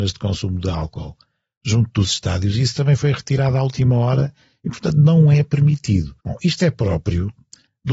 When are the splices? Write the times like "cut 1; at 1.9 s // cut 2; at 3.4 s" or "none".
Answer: cut 1; at 6.2 s